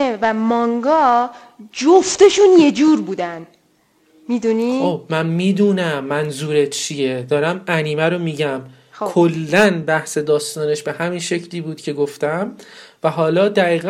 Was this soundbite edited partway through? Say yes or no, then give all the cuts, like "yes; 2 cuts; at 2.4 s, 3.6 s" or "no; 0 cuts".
no; 0 cuts